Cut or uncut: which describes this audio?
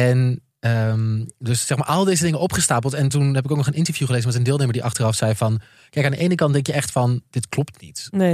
uncut